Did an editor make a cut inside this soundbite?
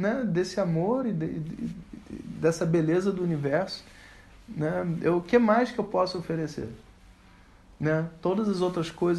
no; 0 cuts

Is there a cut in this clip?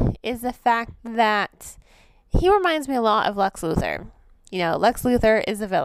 no; 0 cuts

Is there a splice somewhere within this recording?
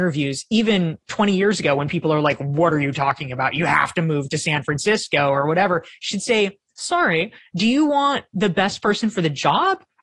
no; 0 cuts

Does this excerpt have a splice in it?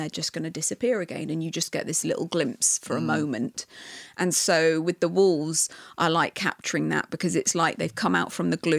no; 0 cuts

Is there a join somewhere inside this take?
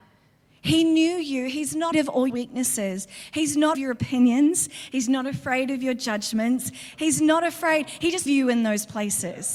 yes; 4 cuts; at 1.9 s, 2.3 s, 3.7 s, 8.3 s

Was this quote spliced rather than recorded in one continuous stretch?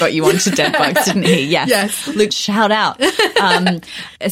yes; 1 cut; at 2.3 s

